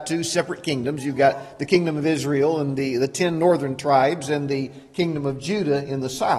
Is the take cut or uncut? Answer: uncut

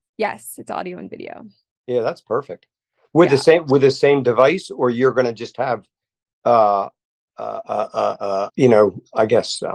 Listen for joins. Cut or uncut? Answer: cut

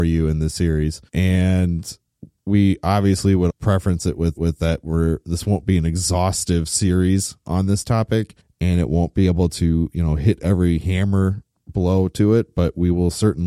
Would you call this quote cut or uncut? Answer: cut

